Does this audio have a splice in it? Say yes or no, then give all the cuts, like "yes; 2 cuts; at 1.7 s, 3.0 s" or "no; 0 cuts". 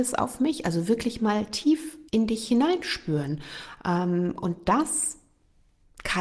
yes; 1 cut; at 2.1 s